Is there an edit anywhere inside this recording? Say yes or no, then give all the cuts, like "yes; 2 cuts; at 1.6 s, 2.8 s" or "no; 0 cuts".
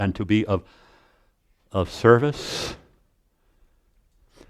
no; 0 cuts